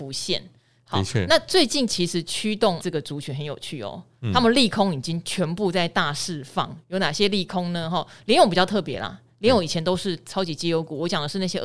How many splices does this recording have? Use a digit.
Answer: 2